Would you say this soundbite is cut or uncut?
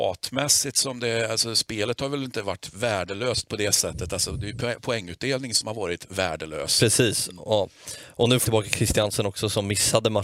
cut